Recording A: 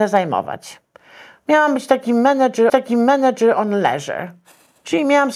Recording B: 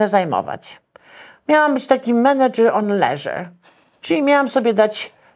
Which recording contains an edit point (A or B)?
A